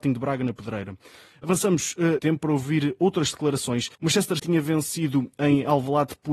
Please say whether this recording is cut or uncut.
cut